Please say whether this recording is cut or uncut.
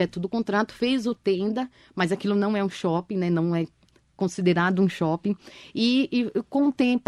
uncut